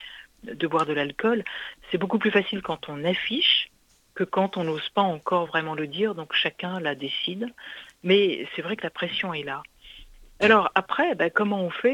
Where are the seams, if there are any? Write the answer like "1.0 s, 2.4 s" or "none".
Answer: none